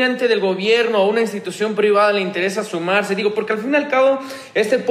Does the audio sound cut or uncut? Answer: uncut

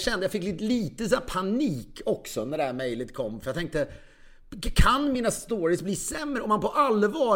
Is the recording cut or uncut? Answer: uncut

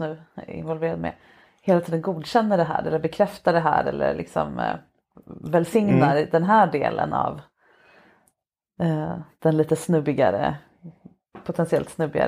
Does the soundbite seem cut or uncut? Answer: uncut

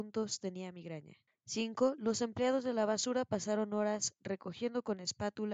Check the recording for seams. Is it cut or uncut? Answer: cut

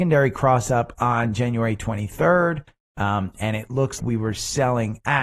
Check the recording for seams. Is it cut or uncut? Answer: cut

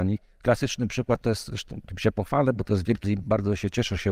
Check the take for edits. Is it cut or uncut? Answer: cut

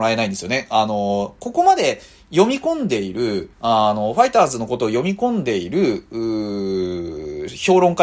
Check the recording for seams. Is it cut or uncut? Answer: cut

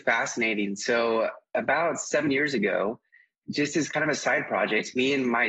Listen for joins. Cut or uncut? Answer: uncut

